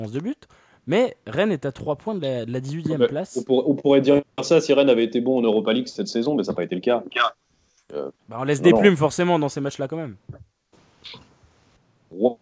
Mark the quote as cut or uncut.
cut